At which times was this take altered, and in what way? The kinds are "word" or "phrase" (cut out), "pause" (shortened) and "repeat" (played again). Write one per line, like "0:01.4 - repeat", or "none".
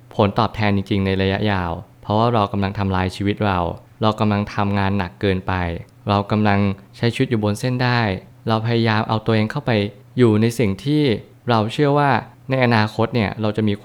none